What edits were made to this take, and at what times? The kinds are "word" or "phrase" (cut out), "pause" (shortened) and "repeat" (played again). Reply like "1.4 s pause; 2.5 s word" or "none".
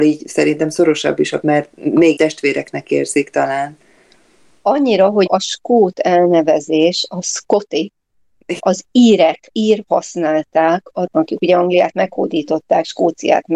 1.4 s word; 2.2 s word; 5.3 s word; 8.6 s word; 9.5 s word; 9.9 s word; 11.1 s word